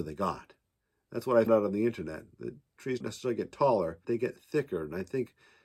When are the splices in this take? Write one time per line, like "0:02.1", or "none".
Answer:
0:01.5
0:03.0
0:04.0